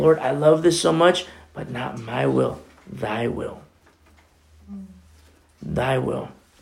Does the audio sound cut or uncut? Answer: uncut